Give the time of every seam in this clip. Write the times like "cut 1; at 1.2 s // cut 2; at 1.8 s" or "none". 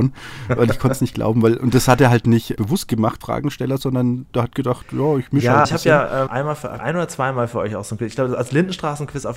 cut 1; at 2.6 s // cut 2; at 3.2 s // cut 3; at 4.2 s // cut 4; at 5.6 s // cut 5; at 6.3 s // cut 6; at 6.8 s